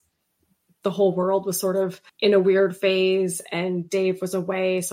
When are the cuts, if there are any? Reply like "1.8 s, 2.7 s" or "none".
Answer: 2.1 s